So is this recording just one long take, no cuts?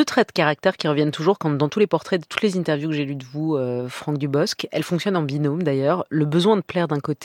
yes; 0 cuts

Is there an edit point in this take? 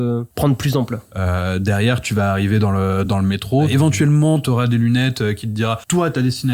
no; 0 cuts

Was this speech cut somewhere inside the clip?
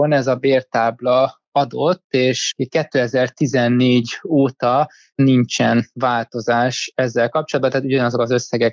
no; 0 cuts

